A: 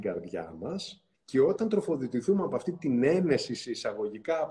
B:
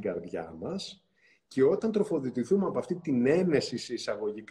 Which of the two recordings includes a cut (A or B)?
A